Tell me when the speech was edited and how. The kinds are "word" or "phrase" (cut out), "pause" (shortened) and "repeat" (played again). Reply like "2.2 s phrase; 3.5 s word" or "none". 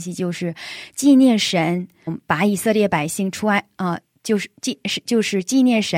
2.1 s word

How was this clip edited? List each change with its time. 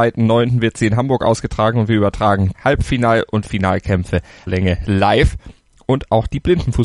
2.5 s word; 4.5 s phrase

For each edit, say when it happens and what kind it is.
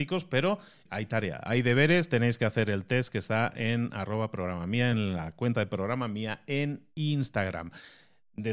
none

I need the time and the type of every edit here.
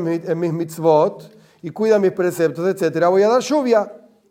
none

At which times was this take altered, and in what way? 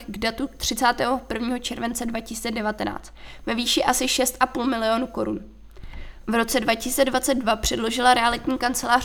none

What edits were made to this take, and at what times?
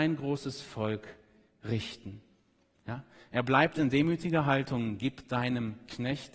none

